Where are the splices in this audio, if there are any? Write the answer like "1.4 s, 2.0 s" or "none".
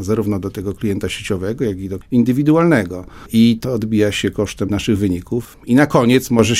2.0 s, 3.6 s, 4.7 s